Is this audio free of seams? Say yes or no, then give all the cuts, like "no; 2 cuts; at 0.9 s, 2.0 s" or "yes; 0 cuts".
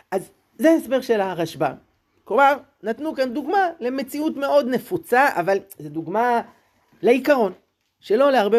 yes; 0 cuts